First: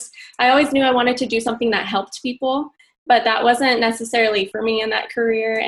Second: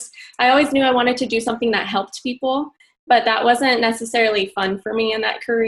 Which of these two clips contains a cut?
first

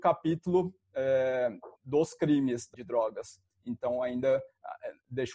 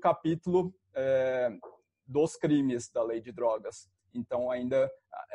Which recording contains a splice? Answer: first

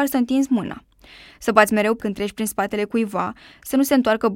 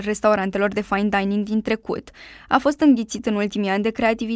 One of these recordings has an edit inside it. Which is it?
first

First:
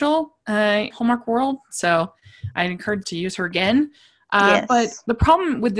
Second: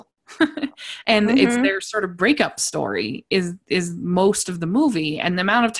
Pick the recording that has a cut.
first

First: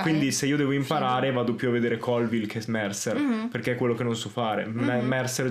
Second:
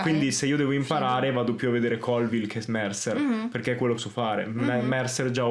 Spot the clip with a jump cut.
second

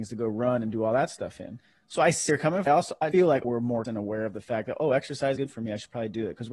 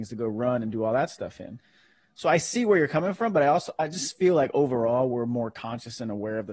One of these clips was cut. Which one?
first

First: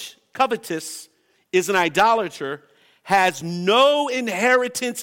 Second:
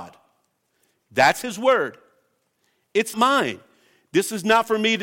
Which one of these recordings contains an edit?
second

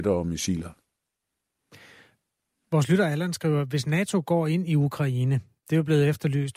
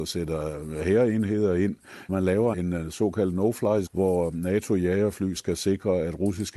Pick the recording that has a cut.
second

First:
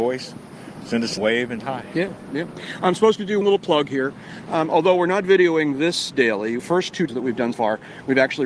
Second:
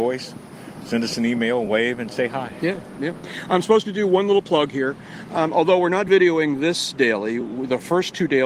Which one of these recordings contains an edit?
first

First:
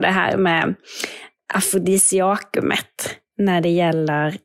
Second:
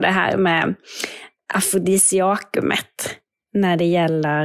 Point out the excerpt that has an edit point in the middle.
first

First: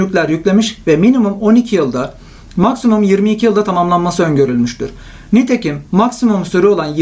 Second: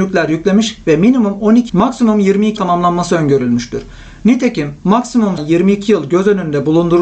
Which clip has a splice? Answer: second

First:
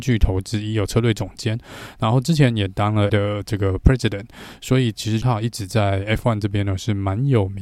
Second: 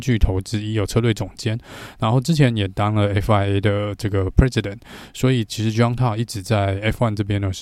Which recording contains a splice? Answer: first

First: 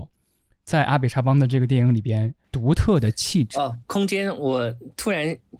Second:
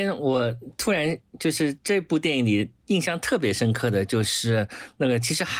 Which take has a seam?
first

